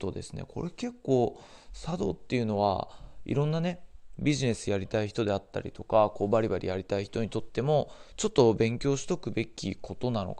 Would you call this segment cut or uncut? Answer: uncut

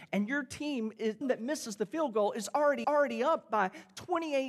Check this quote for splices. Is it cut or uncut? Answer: cut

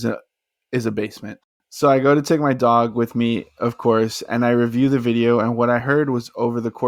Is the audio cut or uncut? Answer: uncut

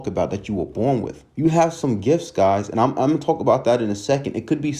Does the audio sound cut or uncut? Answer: cut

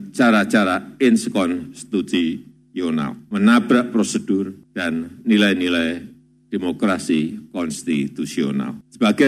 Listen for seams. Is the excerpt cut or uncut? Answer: uncut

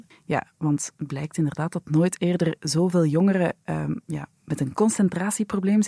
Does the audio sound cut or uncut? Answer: uncut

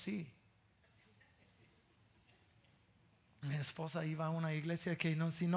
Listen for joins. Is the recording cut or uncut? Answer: uncut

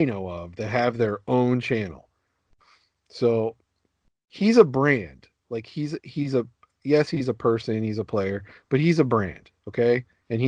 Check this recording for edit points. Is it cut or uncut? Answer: uncut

